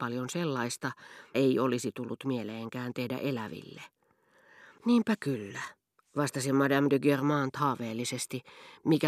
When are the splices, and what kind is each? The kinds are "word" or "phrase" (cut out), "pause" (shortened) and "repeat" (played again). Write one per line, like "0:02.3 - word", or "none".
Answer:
0:01.3 - word

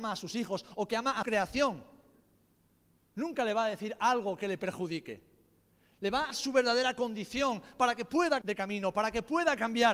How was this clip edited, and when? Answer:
0:01.2 - word
0:06.3 - word
0:08.4 - word

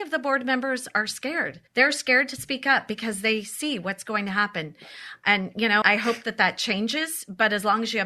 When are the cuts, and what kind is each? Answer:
0:01.7 - pause
0:05.8 - word

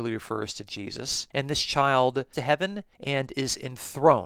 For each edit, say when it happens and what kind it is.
0:01.3 - pause
0:02.3 - word
0:02.9 - pause

